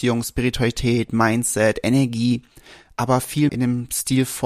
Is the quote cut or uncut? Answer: cut